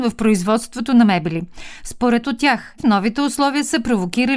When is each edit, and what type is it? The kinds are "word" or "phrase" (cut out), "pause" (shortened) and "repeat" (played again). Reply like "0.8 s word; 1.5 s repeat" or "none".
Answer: 2.2 s word; 2.8 s phrase